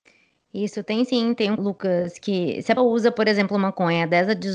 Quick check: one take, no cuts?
no; 2 cuts; at 1.6 s, 2.8 s

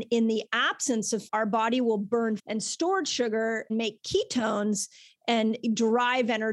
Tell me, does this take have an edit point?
yes; 3 cuts; at 1.3 s, 2.4 s, 3.7 s

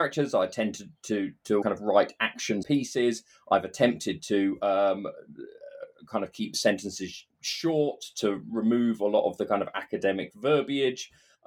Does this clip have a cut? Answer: yes; 3 cuts; at 1.6 s, 2.6 s, 7.3 s

